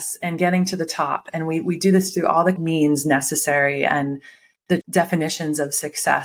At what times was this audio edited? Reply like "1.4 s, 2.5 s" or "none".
2.6 s, 4.8 s